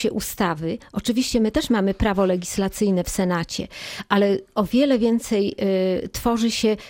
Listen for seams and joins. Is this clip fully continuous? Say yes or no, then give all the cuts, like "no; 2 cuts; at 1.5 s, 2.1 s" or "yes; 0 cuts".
yes; 0 cuts